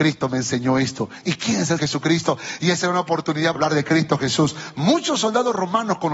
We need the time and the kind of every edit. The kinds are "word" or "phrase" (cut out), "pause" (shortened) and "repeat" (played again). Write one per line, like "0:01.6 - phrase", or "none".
0:01.8 - word
0:03.6 - word